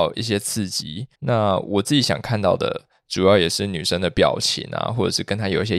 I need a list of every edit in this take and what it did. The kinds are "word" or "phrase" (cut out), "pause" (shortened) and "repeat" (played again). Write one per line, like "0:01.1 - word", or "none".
0:01.1 - pause

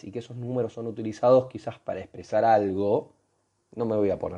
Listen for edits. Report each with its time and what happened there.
none

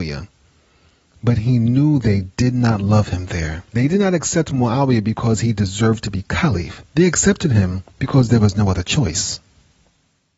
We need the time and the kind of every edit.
0:03.7 - pause
0:06.9 - pause

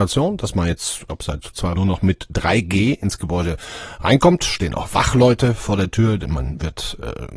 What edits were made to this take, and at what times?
0:01.1 - word
0:01.8 - word

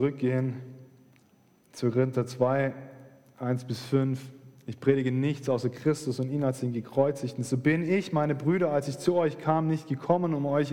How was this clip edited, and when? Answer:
none

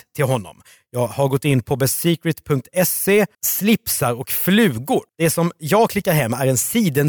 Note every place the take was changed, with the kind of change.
0:03.3 - pause
0:05.1 - pause

